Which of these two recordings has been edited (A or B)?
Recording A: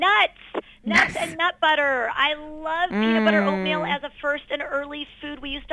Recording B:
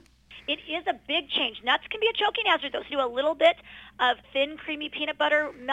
B